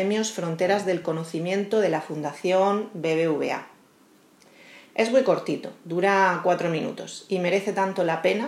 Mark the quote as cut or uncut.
uncut